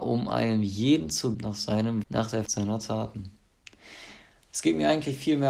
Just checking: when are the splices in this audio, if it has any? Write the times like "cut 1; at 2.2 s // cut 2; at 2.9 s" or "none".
cut 1; at 1.3 s // cut 2; at 2.0 s // cut 3; at 2.5 s